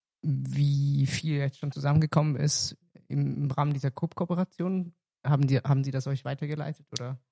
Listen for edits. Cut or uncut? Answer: uncut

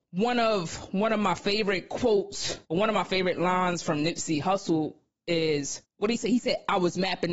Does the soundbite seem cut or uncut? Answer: cut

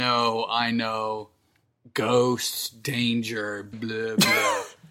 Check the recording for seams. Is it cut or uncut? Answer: cut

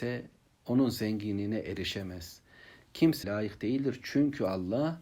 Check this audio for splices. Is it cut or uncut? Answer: cut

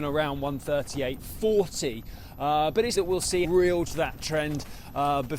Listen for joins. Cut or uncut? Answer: cut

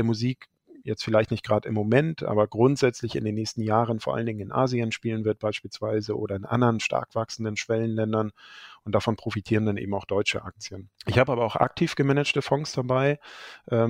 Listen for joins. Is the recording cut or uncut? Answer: cut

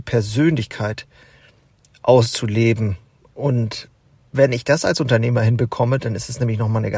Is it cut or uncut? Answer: uncut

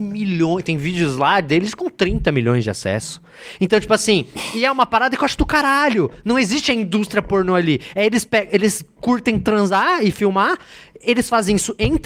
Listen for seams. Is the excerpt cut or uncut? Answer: uncut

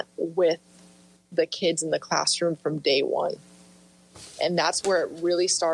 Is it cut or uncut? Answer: uncut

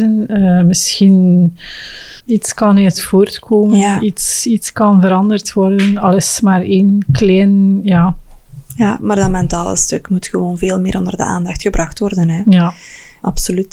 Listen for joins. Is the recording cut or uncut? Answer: cut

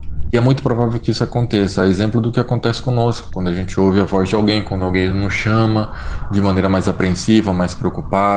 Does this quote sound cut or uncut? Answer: uncut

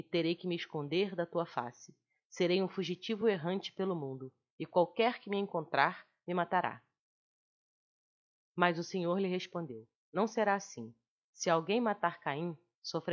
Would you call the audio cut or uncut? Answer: uncut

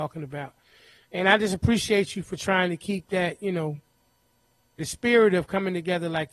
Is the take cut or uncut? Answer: uncut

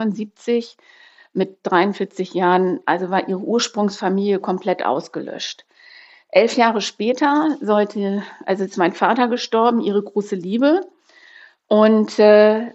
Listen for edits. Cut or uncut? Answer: uncut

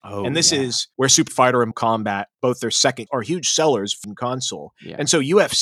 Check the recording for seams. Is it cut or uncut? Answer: cut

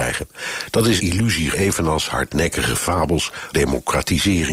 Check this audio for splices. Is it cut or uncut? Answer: cut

